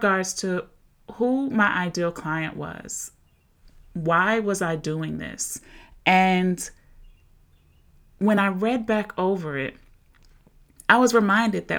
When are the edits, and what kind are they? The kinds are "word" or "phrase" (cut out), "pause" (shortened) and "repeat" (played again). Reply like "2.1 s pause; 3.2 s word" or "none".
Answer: none